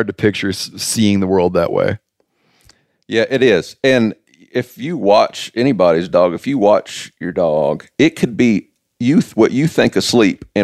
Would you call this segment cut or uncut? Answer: uncut